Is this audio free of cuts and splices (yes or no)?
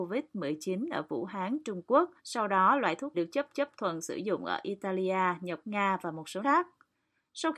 no